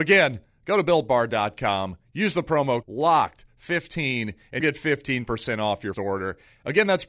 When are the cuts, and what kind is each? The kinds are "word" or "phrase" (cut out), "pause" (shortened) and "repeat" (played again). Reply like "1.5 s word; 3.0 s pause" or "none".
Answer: 2.8 s word; 4.6 s word; 5.9 s word